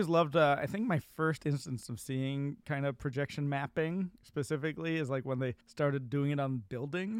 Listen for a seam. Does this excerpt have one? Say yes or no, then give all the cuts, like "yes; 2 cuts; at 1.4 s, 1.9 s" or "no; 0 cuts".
yes; 1 cut; at 5.6 s